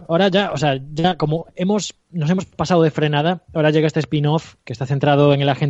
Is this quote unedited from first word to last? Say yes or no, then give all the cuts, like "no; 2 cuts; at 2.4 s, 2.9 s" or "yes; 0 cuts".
no; 1 cut; at 2.0 s